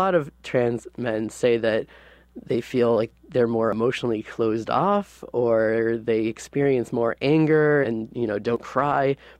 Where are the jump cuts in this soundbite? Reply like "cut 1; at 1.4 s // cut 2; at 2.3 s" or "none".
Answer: cut 1; at 7.8 s